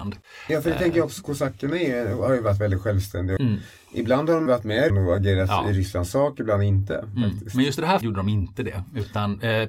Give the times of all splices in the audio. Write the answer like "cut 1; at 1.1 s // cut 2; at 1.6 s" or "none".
cut 1; at 3.4 s // cut 2; at 4.5 s // cut 3; at 4.9 s // cut 4; at 8.0 s

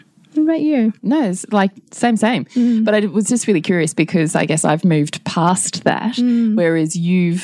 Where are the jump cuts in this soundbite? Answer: cut 1; at 1.0 s // cut 2; at 1.9 s

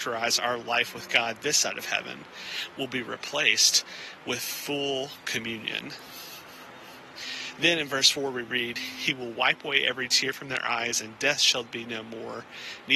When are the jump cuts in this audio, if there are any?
none

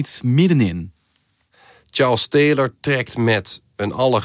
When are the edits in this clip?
none

